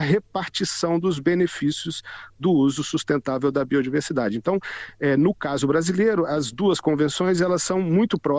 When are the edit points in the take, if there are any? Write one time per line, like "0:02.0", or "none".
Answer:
none